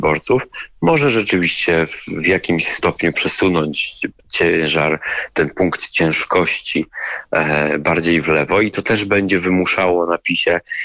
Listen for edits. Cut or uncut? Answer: uncut